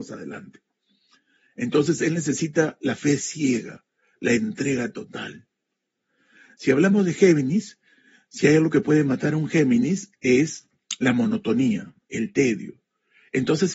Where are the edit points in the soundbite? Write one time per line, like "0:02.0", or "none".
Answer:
none